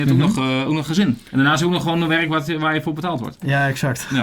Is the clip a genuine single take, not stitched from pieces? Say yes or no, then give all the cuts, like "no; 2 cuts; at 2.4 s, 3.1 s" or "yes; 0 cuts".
yes; 0 cuts